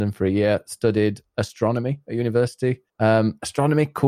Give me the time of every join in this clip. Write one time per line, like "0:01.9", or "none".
0:02.9